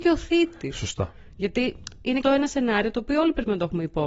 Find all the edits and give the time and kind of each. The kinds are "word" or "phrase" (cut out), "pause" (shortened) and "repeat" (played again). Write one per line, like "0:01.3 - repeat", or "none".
0:02.2 - word